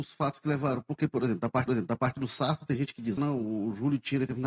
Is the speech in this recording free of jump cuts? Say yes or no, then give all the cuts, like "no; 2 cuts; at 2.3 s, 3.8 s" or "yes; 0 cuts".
no; 2 cuts; at 1.7 s, 3.2 s